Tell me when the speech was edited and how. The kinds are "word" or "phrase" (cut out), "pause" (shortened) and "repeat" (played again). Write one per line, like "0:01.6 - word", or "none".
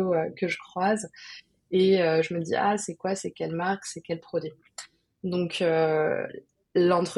none